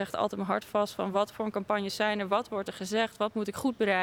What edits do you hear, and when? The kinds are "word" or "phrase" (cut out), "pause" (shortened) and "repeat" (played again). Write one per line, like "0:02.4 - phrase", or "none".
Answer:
none